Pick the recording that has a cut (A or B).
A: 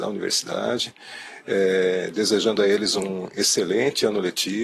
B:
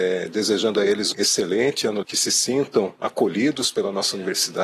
B